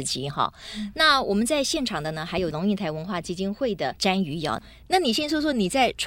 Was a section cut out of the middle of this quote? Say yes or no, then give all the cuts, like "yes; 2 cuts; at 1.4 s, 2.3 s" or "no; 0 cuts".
no; 0 cuts